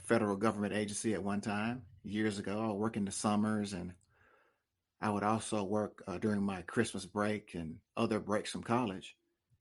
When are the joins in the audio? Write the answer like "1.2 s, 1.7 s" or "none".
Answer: none